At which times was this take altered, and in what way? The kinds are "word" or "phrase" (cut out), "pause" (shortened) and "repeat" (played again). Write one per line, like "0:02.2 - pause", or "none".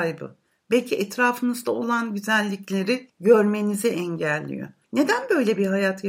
none